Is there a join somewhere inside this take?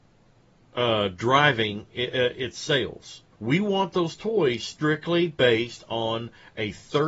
yes; 1 cut; at 3.3 s

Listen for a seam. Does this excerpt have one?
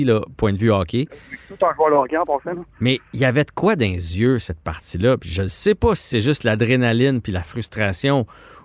no; 0 cuts

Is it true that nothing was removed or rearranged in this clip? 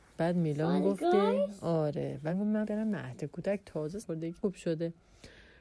no; 4 cuts; at 2.3 s, 2.6 s, 4.0 s, 4.4 s

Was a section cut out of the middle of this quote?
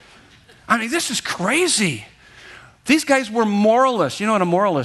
no; 0 cuts

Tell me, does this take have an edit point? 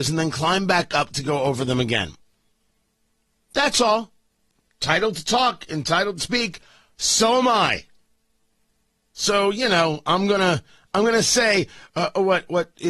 no; 0 cuts

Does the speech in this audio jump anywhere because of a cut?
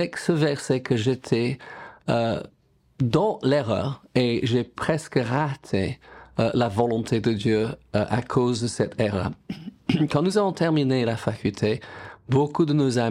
no; 0 cuts

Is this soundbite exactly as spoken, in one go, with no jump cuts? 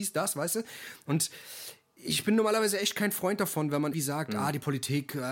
no; 1 cut; at 3.9 s

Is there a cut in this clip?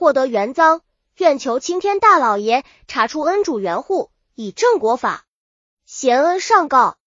no; 0 cuts

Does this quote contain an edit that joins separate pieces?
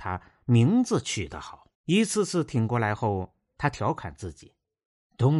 yes; 1 cut; at 1.7 s

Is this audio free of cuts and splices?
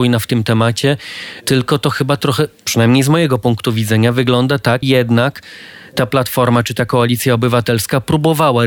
no; 1 cut; at 4.8 s

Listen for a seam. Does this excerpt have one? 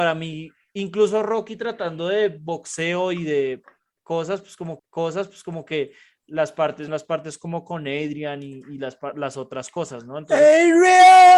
yes; 2 cuts; at 4.8 s, 6.9 s

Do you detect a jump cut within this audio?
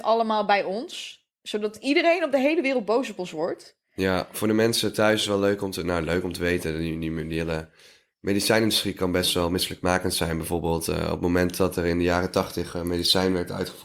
no; 0 cuts

